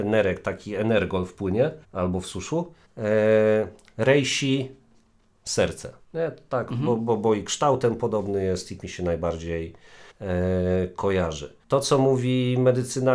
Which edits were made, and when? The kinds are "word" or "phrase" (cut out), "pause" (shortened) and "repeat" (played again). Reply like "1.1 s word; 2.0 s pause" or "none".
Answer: 1.8 s pause; 2.8 s pause; 6.0 s pause; 8.8 s phrase; 10.1 s pause; 11.6 s pause